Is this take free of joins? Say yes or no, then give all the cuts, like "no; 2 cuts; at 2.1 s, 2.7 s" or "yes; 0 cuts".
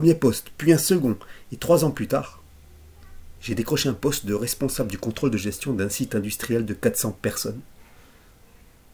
no; 1 cut; at 3.4 s